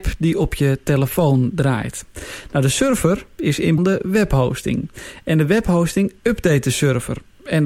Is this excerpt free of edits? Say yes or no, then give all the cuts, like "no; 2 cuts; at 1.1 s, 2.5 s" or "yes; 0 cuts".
no; 1 cut; at 3.8 s